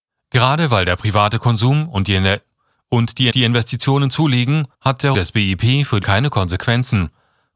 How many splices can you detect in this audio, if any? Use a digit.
4